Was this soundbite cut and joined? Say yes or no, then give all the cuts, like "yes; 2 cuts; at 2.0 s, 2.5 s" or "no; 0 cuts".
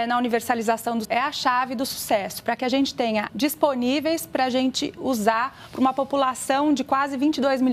yes; 2 cuts; at 1.0 s, 3.3 s